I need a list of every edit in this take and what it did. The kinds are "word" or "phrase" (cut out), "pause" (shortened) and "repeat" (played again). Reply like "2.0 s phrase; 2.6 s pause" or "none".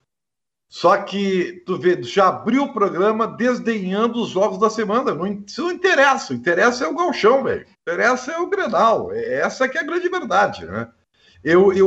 7.7 s pause